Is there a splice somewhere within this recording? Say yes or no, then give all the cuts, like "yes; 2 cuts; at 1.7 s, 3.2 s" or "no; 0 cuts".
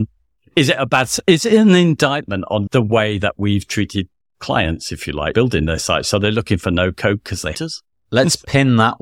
yes; 3 cuts; at 2.7 s, 5.3 s, 7.5 s